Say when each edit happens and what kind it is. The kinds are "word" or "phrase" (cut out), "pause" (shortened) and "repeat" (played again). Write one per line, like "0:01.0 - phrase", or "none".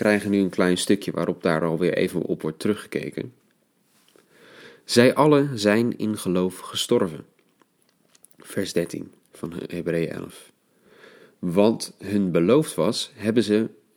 none